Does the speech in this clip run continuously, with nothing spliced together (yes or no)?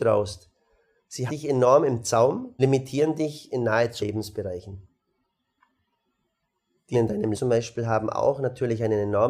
no